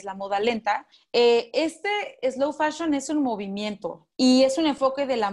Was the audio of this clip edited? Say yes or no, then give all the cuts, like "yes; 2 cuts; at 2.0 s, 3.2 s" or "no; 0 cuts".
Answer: yes; 1 cut; at 0.9 s